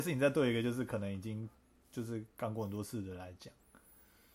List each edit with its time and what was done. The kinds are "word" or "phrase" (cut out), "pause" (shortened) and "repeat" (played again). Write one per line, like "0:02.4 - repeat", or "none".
none